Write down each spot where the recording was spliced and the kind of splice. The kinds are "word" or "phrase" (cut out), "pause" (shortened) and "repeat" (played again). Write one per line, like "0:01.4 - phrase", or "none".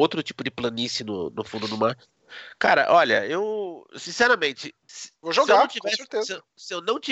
0:04.8 - pause

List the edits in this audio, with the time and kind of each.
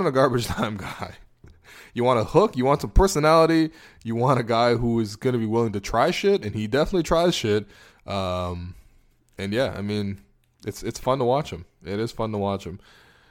none

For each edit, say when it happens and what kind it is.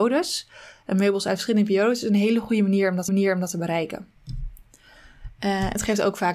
0:03.1 - repeat
0:04.2 - pause

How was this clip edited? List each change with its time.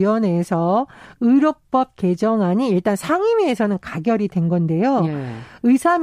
none

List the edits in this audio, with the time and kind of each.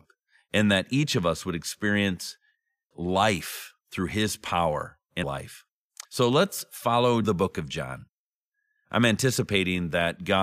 0:02.9 - word
0:03.8 - pause
0:05.2 - word
0:06.0 - pause
0:07.2 - phrase

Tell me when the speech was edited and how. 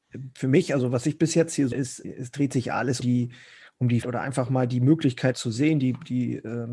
0:01.7 - word
0:02.0 - word
0:03.0 - word
0:04.0 - word
0:05.3 - word

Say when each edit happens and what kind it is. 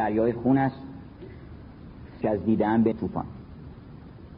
0:02.2 - word
0:02.9 - word

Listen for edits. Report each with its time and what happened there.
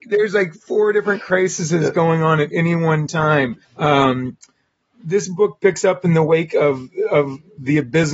0:03.6 - pause

